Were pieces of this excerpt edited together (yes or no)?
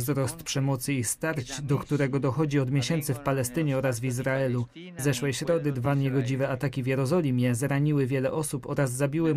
no